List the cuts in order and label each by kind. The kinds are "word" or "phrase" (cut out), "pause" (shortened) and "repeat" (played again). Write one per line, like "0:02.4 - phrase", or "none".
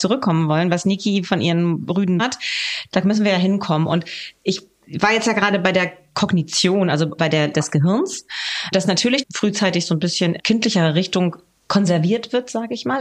0:02.2 - word
0:07.2 - word
0:07.5 - word
0:08.7 - word
0:09.2 - word
0:10.4 - word